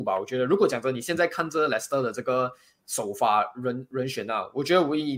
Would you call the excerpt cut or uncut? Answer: uncut